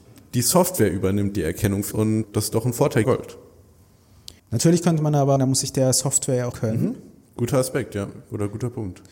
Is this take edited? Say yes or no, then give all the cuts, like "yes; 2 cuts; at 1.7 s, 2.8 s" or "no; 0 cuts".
yes; 6 cuts; at 1.9 s, 2.2 s, 3.0 s, 4.4 s, 5.4 s, 6.5 s